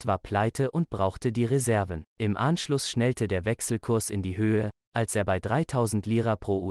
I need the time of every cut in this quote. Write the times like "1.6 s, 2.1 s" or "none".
2.1 s